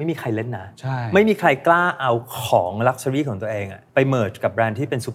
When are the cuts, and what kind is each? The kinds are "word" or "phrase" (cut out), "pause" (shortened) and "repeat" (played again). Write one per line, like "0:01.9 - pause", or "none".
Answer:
0:03.9 - pause